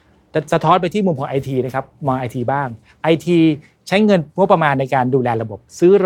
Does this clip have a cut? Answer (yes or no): no